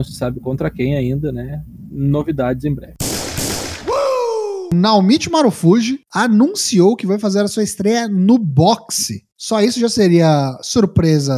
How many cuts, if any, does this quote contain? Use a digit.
0